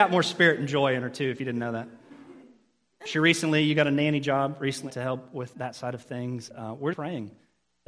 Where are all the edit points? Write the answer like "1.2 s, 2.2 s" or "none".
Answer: 4.9 s, 5.5 s, 6.5 s, 6.9 s